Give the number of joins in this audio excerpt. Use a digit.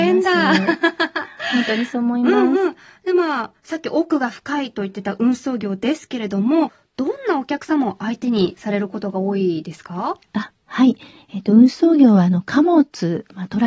0